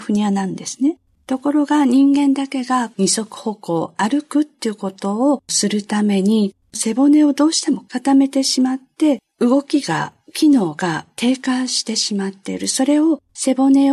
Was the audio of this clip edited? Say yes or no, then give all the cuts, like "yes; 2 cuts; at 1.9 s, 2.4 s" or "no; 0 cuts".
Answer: no; 0 cuts